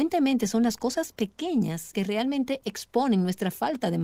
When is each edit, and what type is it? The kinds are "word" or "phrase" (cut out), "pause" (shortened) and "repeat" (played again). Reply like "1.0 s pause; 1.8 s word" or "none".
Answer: 1.9 s word